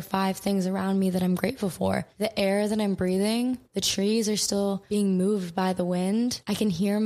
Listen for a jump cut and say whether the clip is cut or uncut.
uncut